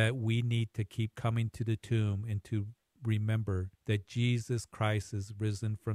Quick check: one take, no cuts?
no; 1 cut; at 3.8 s

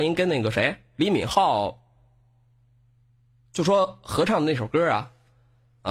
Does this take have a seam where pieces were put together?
no; 0 cuts

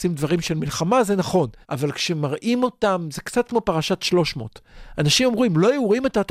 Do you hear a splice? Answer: yes; 1 cut; at 1.6 s

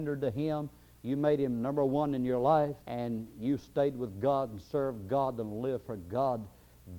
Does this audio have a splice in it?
yes; 1 cut; at 2.8 s

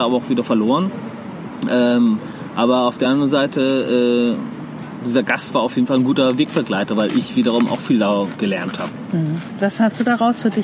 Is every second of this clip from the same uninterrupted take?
yes; 0 cuts

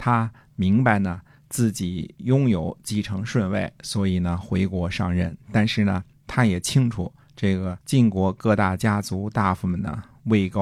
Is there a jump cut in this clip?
yes; 1 cut; at 7.8 s

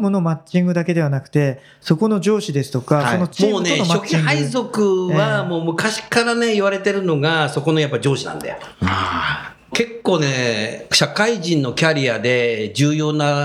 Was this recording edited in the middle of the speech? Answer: yes; 1 cut; at 8.7 s

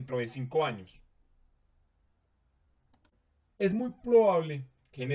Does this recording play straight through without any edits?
yes; 0 cuts

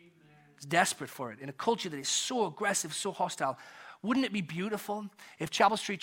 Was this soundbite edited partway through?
no; 0 cuts

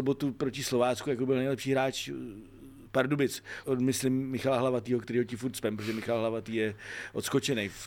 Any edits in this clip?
yes; 1 cut; at 3.6 s

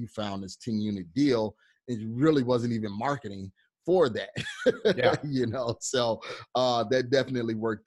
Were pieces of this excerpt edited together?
no; 0 cuts

